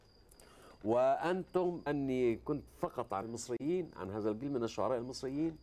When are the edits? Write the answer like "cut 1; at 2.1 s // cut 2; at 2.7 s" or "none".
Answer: cut 1; at 1.9 s // cut 2; at 2.7 s // cut 3; at 3.2 s